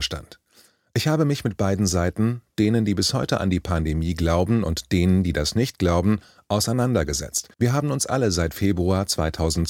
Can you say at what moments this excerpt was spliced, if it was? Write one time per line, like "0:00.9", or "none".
0:07.5